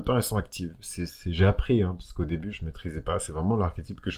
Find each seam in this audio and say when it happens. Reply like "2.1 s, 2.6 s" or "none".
1.1 s, 2.5 s